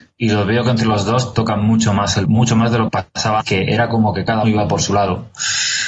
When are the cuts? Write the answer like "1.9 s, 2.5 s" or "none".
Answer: 1.3 s, 2.2 s, 2.9 s, 3.4 s, 4.4 s

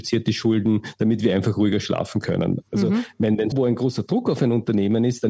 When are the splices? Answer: 3.5 s

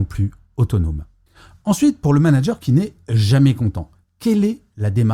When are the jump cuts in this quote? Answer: none

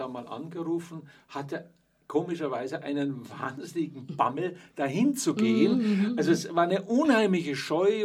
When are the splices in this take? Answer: none

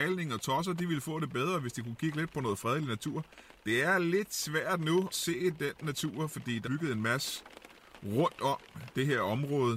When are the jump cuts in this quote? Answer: 5.1 s, 6.6 s

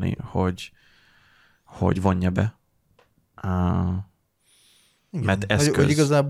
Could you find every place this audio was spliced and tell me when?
none

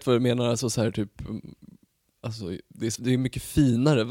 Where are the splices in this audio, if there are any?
2.9 s

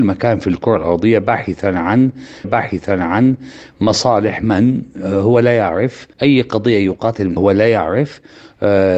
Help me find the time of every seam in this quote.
2.4 s, 6.1 s, 7.4 s

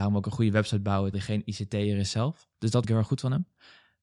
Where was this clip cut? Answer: 1.1 s, 2.8 s

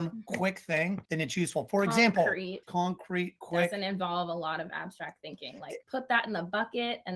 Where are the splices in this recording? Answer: 1.0 s, 2.6 s, 5.8 s

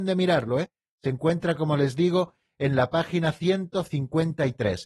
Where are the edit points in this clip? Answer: none

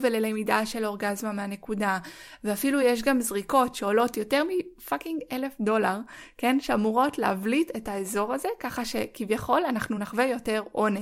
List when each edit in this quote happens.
none

